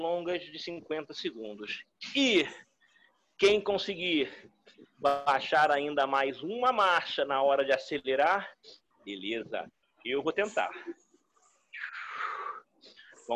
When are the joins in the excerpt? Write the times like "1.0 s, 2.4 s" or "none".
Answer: none